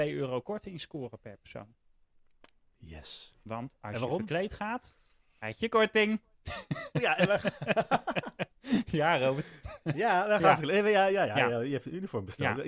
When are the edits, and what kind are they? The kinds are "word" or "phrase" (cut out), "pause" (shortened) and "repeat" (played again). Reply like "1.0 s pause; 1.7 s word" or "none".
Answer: none